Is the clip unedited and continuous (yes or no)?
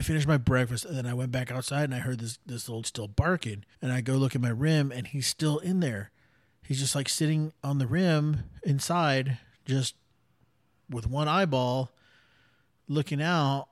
no